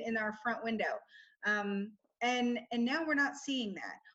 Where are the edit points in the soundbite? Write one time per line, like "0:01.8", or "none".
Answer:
none